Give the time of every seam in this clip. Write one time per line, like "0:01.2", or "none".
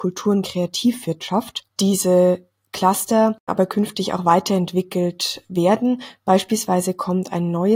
0:01.7
0:03.5

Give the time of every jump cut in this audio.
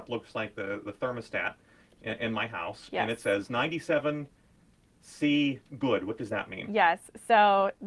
none

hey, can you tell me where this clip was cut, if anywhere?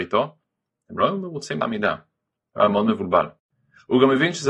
0:01.6

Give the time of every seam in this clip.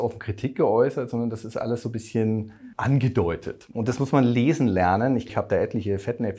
0:02.7
0:05.3

